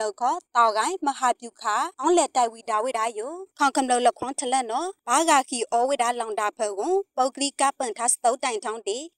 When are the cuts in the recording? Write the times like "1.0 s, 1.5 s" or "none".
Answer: 1.9 s